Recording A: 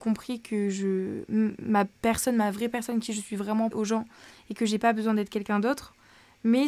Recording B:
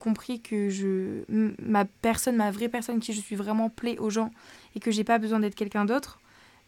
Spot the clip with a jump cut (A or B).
A